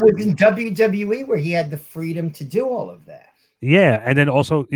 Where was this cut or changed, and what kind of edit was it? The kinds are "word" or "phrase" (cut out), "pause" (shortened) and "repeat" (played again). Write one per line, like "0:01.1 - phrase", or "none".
none